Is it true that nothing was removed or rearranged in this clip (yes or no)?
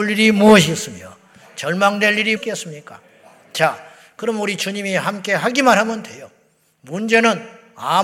no